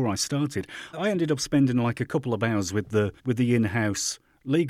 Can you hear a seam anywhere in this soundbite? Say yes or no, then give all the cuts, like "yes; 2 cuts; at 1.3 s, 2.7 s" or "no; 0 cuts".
yes; 2 cuts; at 0.9 s, 3.2 s